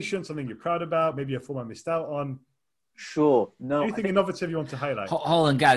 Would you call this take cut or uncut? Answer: uncut